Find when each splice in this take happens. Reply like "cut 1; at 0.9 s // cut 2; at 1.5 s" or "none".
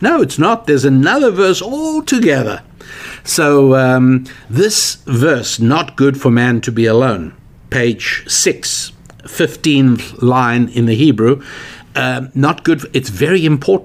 none